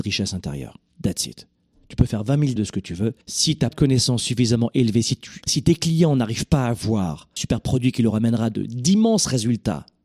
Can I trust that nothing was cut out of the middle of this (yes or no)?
no